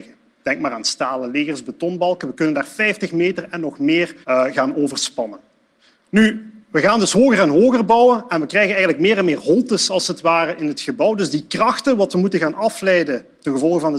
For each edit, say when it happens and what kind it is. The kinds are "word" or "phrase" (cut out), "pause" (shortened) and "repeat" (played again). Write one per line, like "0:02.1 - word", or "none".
0:04.2 - pause